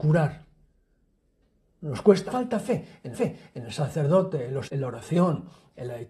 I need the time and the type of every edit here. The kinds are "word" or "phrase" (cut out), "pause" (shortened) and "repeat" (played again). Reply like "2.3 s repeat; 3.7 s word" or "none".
2.3 s word; 3.1 s repeat; 4.7 s word